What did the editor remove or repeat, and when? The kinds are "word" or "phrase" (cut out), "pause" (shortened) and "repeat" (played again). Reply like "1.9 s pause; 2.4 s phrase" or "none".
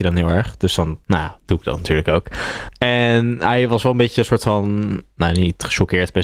1.0 s pause